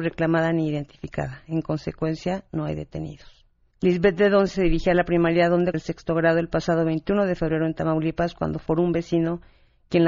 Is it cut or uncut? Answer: cut